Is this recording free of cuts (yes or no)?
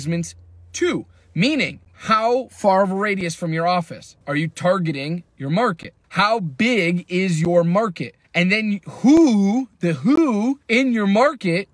no